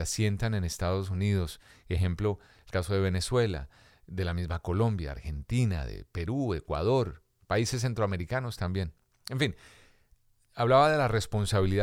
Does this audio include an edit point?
no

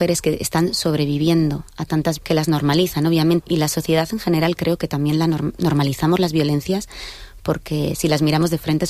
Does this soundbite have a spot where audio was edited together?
yes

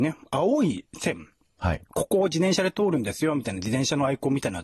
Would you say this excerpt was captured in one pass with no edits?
yes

